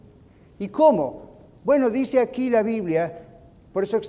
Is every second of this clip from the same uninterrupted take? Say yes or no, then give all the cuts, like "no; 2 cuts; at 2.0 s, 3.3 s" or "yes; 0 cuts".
yes; 0 cuts